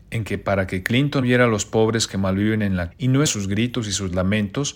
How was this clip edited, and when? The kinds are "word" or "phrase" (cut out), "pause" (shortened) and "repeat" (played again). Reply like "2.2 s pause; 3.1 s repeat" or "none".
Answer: 1.2 s word; 2.9 s word; 3.3 s word